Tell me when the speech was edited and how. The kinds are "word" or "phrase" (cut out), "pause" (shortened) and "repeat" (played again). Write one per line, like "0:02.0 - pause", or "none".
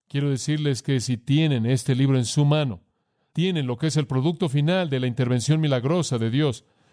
none